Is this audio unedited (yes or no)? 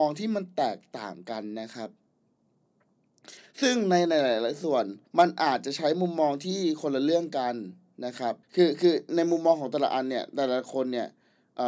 no